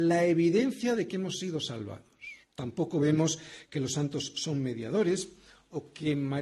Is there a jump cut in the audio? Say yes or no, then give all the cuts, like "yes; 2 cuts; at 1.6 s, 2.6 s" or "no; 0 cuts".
yes; 1 cut; at 2.4 s